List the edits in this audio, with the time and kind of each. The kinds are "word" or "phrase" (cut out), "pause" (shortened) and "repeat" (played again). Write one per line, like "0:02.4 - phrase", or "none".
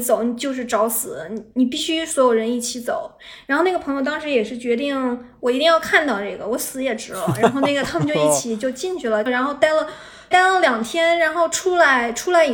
0:09.3 - phrase
0:10.3 - word